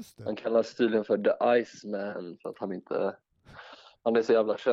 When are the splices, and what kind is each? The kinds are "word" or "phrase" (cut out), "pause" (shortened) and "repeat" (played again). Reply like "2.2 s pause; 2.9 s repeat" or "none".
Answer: none